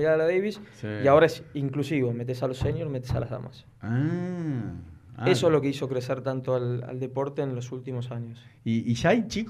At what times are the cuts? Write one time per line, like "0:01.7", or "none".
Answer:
none